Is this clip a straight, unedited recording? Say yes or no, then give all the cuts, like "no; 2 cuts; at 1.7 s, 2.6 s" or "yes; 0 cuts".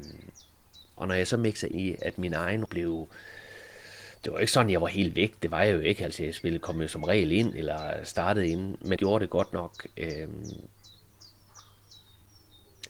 no; 4 cuts; at 1.7 s, 2.7 s, 4.2 s, 9.0 s